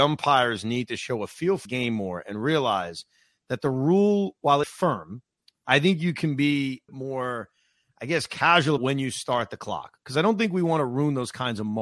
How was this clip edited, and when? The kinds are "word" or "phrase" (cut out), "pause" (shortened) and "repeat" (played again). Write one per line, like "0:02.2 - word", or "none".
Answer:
0:01.7 - word
0:04.6 - phrase
0:06.9 - phrase
0:08.8 - word